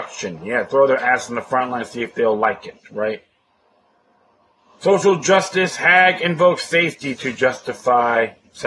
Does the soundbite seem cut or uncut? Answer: uncut